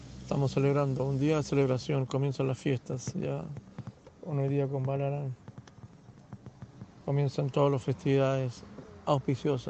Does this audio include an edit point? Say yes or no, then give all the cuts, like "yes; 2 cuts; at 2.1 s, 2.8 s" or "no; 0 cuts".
no; 0 cuts